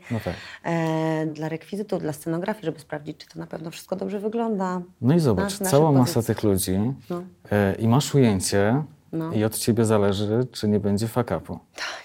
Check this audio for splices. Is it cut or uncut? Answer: cut